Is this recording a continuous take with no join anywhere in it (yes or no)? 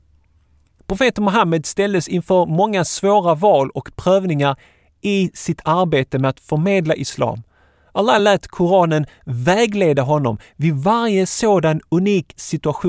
yes